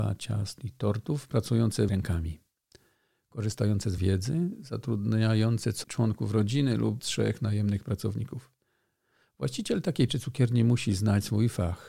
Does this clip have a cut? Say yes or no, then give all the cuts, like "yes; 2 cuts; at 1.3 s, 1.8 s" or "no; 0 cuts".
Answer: yes; 5 cuts; at 1.9 s, 4.0 s, 5.8 s, 7.0 s, 10.1 s